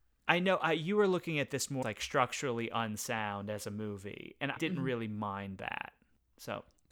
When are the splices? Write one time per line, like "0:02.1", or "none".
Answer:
0:01.8
0:04.6